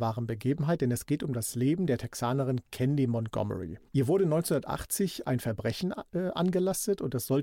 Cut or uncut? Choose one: cut